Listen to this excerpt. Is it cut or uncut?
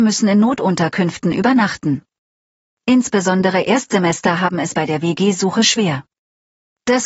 uncut